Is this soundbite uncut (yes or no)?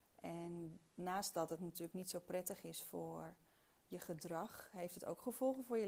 yes